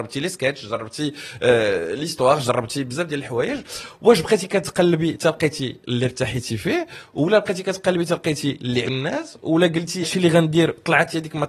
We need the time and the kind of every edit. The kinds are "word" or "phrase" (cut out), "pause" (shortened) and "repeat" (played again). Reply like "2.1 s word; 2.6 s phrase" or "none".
8.8 s word; 10.0 s word